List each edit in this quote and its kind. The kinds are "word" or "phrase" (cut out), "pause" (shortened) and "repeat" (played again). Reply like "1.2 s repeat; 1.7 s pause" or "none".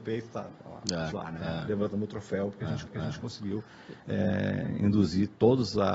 1.1 s word; 2.9 s repeat